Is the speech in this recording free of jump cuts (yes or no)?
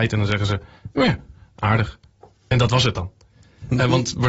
yes